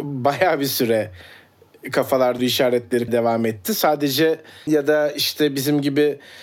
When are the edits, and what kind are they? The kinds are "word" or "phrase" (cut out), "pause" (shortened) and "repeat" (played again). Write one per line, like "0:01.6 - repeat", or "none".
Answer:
0:02.4 - word
0:03.1 - word
0:04.7 - word